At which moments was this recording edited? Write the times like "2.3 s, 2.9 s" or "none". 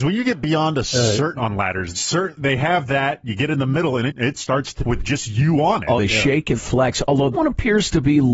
1.4 s, 1.9 s, 2.4 s, 4.1 s, 4.8 s, 6.0 s, 6.6 s, 7.3 s